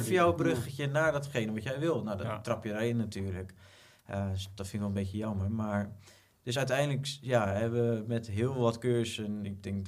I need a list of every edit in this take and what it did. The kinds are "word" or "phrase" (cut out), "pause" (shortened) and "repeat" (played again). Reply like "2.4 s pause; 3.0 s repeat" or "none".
none